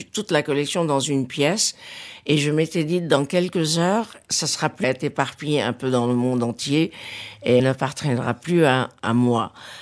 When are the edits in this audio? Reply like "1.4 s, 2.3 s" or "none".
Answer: 4.2 s, 4.8 s, 7.6 s